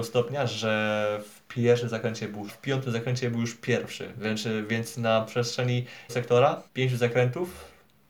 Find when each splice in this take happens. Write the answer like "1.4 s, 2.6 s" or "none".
2.5 s, 6.1 s, 6.7 s